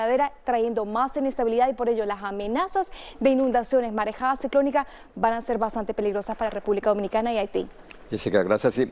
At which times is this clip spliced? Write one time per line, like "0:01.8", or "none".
none

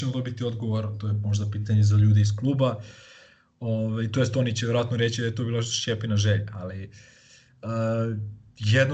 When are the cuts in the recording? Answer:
none

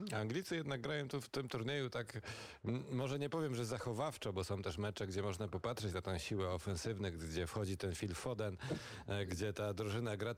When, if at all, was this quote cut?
none

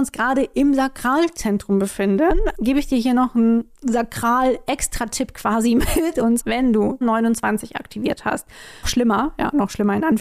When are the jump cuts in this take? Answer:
0:02.5
0:03.7
0:06.4
0:07.0
0:08.8

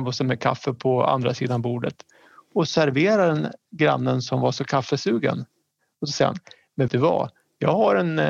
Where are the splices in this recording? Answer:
0:06.9

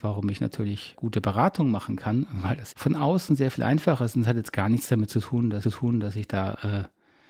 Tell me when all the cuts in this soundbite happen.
0:00.9
0:02.7
0:05.6

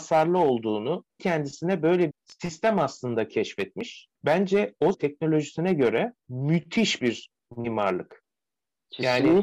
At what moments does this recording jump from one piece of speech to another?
0:01.2
0:02.1
0:04.2
0:04.9
0:06.2

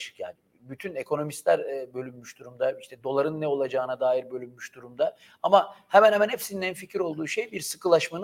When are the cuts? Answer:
none

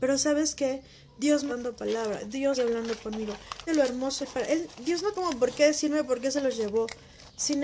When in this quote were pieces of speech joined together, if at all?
0:01.5
0:02.5
0:03.7
0:04.2
0:05.1

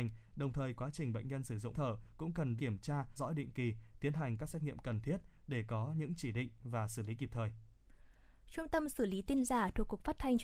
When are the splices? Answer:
0:01.7
0:02.6
0:03.2

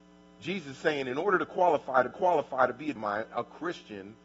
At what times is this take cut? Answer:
0:02.1
0:03.0

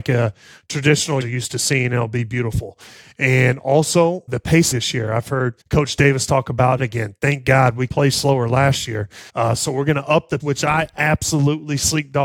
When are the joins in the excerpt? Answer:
0:01.2
0:04.3
0:04.7
0:05.6
0:06.8
0:07.9
0:09.3
0:10.4

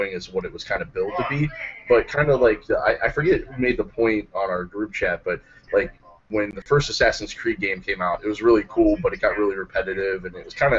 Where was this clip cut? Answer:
none

